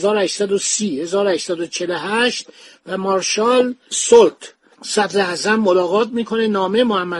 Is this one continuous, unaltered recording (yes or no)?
yes